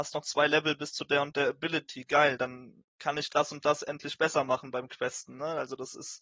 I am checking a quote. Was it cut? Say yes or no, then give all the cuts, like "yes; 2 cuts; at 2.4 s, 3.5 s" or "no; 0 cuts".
yes; 1 cut; at 2.9 s